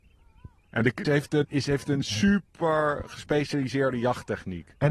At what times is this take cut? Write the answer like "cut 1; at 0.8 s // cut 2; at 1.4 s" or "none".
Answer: cut 1; at 1.0 s // cut 2; at 1.4 s